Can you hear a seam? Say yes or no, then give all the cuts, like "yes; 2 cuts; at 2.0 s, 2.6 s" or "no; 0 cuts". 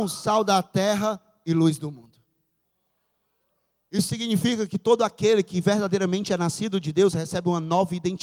no; 0 cuts